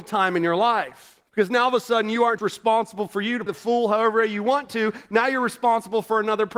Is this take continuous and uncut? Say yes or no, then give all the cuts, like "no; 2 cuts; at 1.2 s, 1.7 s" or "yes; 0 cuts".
no; 3 cuts; at 1.3 s, 2.4 s, 3.5 s